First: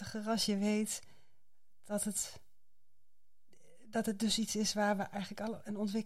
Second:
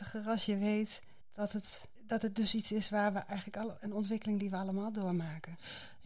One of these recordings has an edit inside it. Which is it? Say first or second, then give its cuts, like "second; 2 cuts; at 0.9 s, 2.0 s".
second; 2 cuts; at 1.2 s, 2.0 s